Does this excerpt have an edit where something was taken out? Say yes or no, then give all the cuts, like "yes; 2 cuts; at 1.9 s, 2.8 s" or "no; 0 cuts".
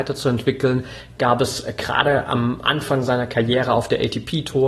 no; 0 cuts